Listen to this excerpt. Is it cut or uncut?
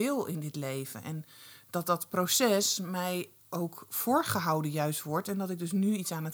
uncut